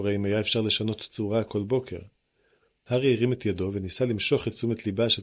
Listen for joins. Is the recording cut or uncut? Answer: uncut